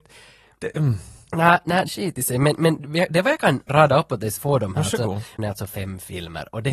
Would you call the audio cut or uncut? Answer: cut